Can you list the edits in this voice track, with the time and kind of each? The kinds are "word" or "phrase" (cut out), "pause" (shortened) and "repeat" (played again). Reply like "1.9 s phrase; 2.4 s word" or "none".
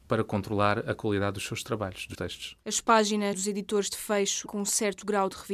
2.1 s word; 3.3 s word; 4.5 s word